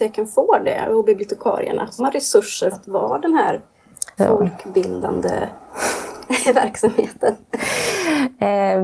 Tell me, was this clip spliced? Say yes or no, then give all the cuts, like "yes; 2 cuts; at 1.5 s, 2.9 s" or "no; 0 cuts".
yes; 3 cuts; at 2.0 s, 2.7 s, 4.2 s